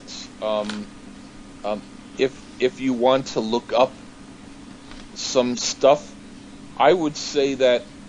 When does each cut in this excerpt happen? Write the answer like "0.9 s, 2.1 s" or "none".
none